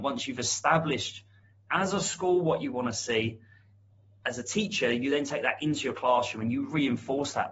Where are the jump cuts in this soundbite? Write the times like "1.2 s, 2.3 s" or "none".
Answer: none